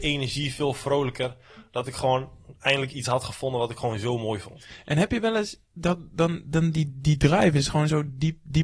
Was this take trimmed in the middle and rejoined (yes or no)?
no